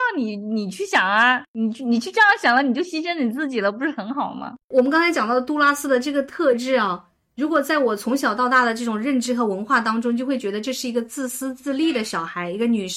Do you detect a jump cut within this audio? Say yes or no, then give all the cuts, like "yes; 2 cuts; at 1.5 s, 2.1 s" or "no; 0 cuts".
no; 0 cuts